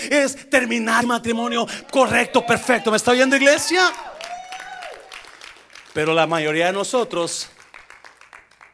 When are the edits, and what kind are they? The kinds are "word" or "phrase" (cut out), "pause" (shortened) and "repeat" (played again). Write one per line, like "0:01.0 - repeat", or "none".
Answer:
0:01.0 - word